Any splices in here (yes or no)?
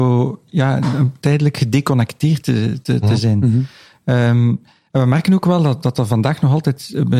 no